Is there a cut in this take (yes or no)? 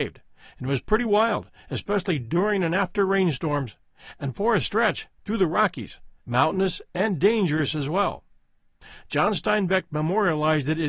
yes